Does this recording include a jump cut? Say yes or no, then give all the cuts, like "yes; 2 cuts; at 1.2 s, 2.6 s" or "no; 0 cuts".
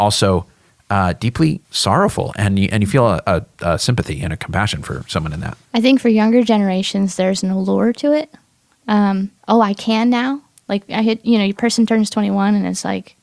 yes; 3 cuts; at 1.6 s, 5.6 s, 9.4 s